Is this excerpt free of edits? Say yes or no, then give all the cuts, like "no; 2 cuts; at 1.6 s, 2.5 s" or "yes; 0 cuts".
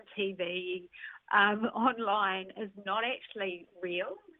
yes; 0 cuts